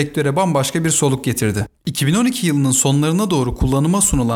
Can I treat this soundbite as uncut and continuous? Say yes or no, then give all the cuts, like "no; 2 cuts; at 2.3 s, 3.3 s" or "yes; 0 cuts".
no; 1 cut; at 1.8 s